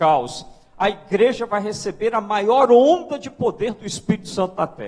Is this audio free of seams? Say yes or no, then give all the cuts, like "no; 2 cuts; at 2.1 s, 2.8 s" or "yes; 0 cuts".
yes; 0 cuts